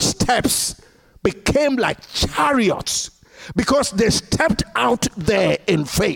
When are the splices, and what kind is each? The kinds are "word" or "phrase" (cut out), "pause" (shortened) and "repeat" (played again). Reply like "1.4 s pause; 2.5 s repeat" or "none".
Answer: none